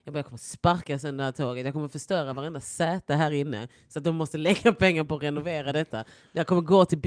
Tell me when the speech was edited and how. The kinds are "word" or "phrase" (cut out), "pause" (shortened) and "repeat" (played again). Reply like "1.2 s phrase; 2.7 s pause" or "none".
none